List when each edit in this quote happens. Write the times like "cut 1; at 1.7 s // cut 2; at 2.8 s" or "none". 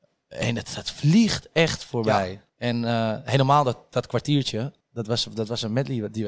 cut 1; at 2.5 s // cut 2; at 4.8 s